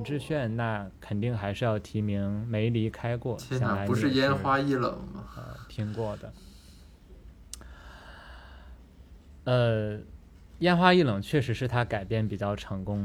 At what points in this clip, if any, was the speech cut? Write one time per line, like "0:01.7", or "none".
none